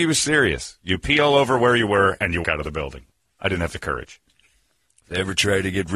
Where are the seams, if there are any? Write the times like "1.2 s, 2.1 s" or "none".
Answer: 2.4 s